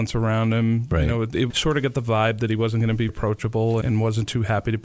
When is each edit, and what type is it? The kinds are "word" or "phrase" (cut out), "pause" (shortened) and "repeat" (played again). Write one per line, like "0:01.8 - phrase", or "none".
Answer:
0:01.5 - word
0:03.1 - word
0:03.8 - word